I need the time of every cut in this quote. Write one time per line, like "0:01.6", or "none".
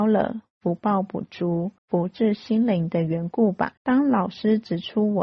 0:01.8
0:03.8